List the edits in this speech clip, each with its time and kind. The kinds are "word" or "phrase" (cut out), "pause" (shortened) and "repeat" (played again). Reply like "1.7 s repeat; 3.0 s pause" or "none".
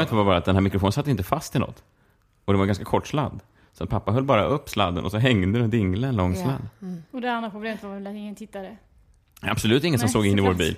none